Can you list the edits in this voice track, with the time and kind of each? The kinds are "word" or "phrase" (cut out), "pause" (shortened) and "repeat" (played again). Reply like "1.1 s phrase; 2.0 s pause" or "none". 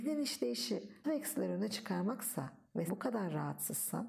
1.0 s word; 2.9 s word